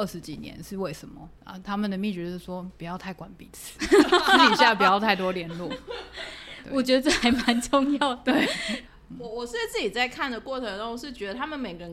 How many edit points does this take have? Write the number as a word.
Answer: one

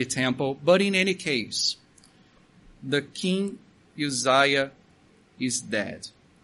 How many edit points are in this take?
zero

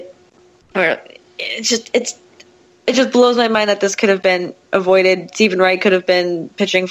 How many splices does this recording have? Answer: zero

